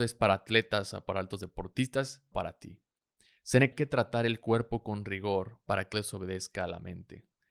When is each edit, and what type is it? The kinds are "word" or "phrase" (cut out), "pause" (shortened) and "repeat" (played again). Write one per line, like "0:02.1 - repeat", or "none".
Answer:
0:02.3 - phrase
0:03.7 - phrase
0:05.9 - word

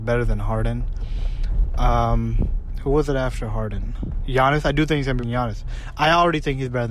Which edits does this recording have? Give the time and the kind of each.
0:05.2 - word

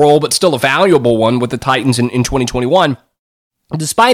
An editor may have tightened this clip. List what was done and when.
none

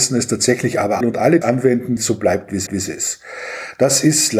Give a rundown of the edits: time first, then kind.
0:01.0 - word
0:01.4 - word
0:02.0 - word
0:02.7 - repeat

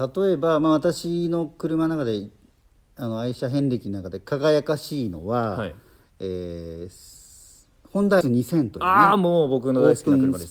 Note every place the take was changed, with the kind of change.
0:08.2 - word

